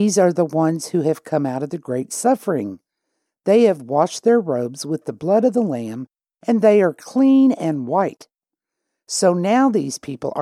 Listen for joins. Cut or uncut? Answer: uncut